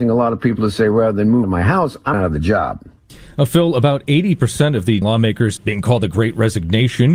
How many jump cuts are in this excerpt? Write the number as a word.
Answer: four